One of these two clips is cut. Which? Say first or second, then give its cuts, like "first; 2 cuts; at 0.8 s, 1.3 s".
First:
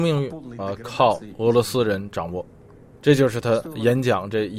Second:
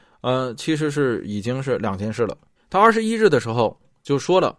second; 1 cut; at 2.6 s